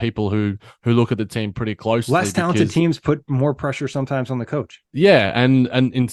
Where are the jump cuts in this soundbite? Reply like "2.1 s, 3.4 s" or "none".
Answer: 4.8 s